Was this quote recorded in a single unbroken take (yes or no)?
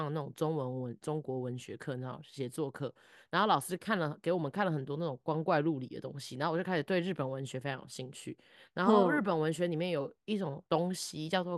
no